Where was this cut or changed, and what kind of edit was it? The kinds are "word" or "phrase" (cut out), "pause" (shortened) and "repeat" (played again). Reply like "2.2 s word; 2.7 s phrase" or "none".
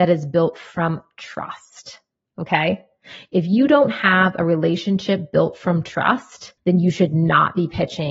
6.6 s pause